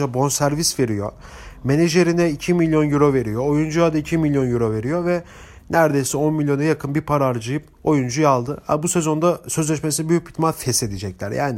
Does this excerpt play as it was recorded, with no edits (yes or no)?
yes